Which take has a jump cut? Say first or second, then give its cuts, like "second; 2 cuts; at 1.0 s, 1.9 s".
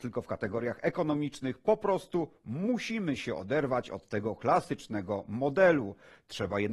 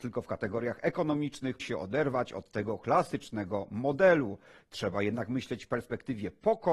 second; 1 cut; at 1.6 s